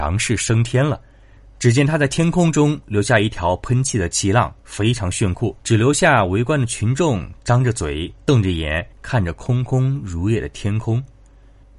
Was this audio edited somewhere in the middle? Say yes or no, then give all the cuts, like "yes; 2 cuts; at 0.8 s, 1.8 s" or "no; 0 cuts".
yes; 4 cuts; at 1.4 s, 4.6 s, 5.6 s, 8.9 s